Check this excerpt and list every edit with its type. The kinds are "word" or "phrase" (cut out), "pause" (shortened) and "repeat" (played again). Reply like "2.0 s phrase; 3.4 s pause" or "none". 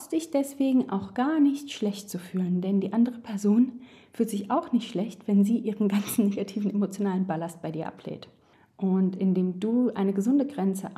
none

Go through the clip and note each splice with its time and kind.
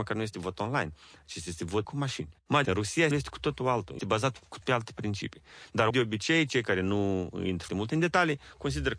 1.8 s word; 2.6 s word; 3.1 s word; 4.0 s word; 4.6 s word; 5.9 s word; 7.7 s word

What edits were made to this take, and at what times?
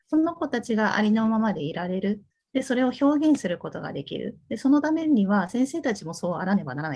2.3 s pause

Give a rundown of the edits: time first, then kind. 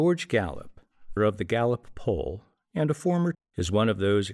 1.2 s word; 3.3 s word

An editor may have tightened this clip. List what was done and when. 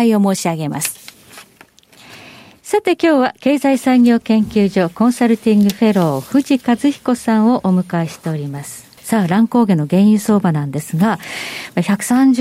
9.0 s pause

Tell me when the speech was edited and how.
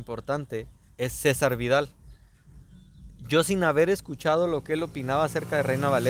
none

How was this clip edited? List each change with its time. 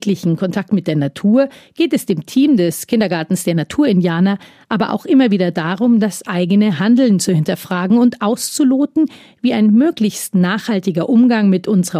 none

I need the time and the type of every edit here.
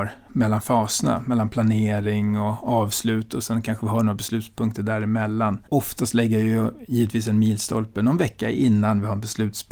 5.7 s pause

